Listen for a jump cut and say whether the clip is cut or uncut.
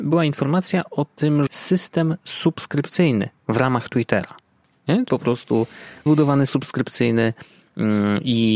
cut